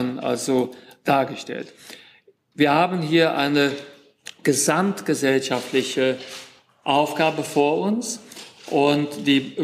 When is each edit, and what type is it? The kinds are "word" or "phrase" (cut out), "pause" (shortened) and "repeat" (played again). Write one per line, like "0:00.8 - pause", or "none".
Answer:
none